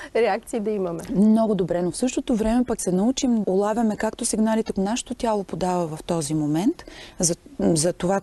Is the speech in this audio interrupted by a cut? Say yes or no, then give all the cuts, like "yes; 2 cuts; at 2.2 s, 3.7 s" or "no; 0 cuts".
yes; 3 cuts; at 2.8 s, 3.4 s, 4.7 s